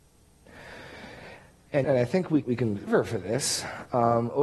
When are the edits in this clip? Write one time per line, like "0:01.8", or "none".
0:01.8
0:02.4
0:02.9